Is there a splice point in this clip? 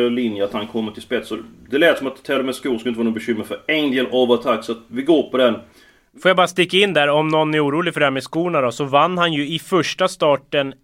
no; 0 cuts

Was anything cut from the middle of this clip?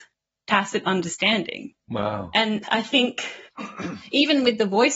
yes; 2 cuts; at 2.6 s, 3.5 s

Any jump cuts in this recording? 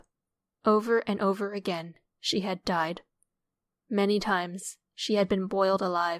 no; 0 cuts

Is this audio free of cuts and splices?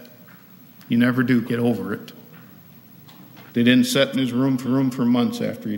no; 4 cuts; at 1.4 s, 3.5 s, 4.1 s, 4.6 s

